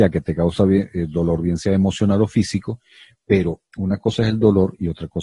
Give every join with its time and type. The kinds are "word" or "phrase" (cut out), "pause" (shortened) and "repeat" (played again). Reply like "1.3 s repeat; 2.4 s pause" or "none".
3.7 s pause